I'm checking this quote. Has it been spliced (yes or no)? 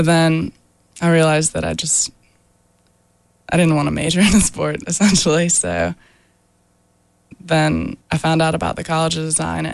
yes